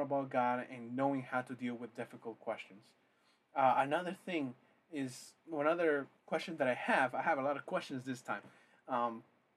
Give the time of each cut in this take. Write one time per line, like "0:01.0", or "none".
0:06.2

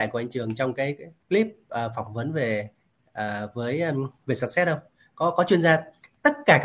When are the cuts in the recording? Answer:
none

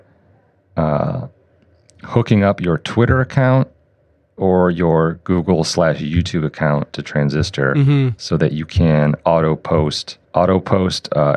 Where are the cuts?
0:04.4
0:10.2

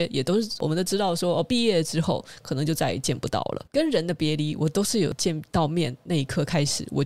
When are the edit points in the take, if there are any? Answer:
0:03.7

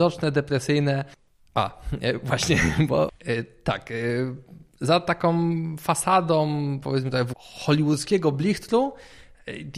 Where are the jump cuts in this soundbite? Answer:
0:07.3

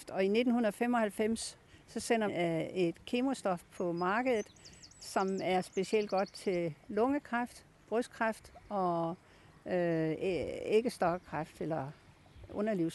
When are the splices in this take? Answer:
0:02.3

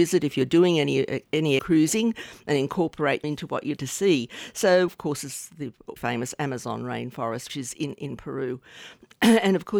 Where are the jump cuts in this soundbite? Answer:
0:01.6
0:03.2
0:03.8
0:04.9
0:06.0
0:07.5

